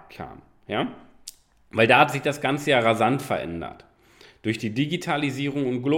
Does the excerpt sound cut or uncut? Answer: uncut